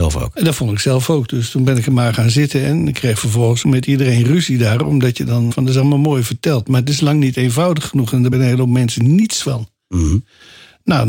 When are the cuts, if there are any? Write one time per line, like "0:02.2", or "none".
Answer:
0:03.6
0:05.5
0:08.3